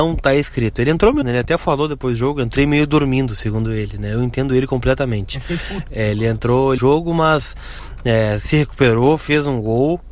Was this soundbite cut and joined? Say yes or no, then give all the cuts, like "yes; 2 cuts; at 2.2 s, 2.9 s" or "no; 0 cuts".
yes; 3 cuts; at 1.2 s, 5.9 s, 6.8 s